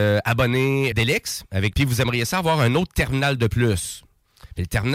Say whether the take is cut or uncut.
cut